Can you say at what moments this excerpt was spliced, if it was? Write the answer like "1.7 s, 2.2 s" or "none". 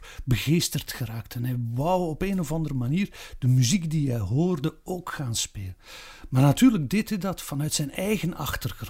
none